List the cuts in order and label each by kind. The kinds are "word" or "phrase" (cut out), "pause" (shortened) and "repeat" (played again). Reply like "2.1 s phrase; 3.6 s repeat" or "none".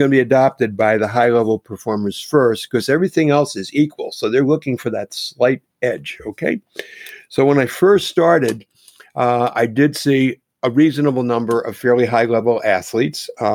none